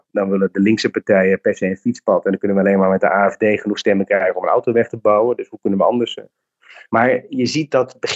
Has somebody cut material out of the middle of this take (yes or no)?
no